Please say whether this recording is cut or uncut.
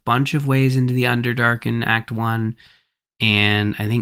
uncut